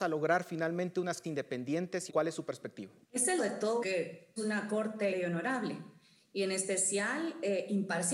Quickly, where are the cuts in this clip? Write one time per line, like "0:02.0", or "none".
0:01.2
0:02.1
0:03.0
0:03.4
0:03.8
0:04.4
0:05.1